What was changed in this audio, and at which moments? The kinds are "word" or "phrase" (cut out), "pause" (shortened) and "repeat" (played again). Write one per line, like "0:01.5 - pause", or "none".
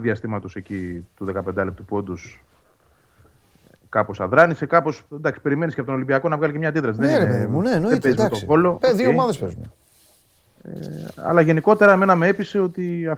none